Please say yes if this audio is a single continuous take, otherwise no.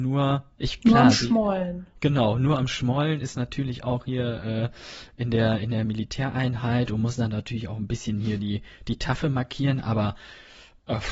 yes